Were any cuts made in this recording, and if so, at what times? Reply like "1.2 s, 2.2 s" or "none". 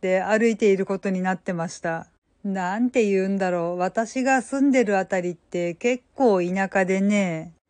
none